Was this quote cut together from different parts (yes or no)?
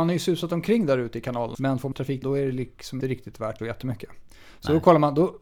yes